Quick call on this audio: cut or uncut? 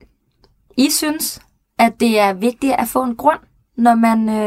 uncut